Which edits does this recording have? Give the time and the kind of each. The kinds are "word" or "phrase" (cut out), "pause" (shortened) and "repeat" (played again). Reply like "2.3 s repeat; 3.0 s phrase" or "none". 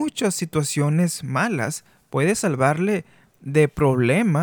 none